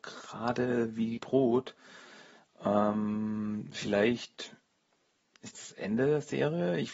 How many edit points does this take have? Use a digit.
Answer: 2